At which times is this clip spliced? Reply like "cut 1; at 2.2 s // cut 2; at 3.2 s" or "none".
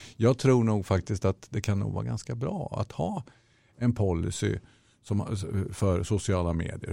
none